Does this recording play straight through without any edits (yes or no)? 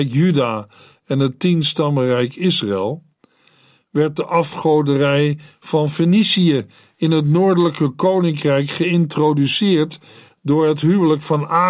yes